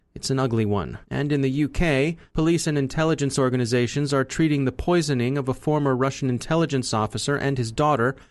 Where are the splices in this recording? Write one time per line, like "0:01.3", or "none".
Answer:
0:01.0
0:02.3